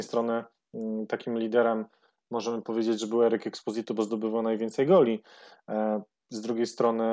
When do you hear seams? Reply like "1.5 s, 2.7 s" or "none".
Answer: none